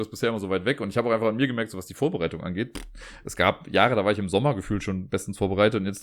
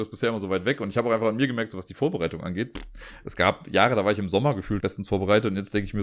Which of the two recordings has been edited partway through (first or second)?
second